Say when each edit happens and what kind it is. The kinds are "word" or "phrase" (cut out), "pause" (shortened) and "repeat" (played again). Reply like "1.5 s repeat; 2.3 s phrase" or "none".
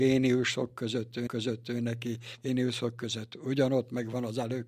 1.3 s repeat